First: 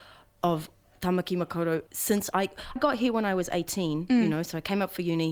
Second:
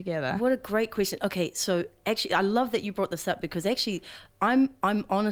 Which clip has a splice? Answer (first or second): first